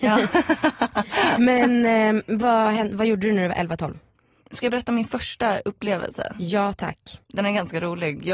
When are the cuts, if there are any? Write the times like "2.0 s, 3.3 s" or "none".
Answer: 7.2 s

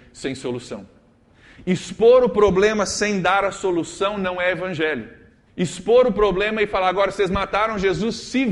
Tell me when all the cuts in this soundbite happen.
5.5 s

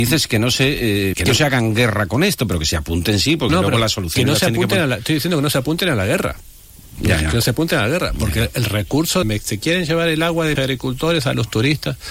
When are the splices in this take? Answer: 1.1 s, 3.5 s, 9.2 s, 10.6 s

